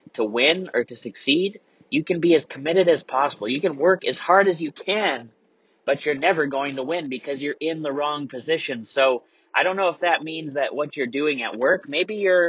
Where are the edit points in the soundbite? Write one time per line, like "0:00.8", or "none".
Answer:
none